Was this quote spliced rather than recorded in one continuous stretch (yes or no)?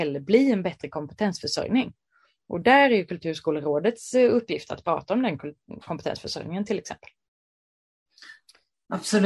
no